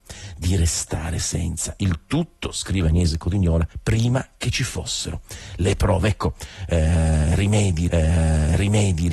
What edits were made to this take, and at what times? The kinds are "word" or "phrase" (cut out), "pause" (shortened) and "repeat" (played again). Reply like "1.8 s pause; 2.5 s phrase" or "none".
3.7 s pause; 7.9 s repeat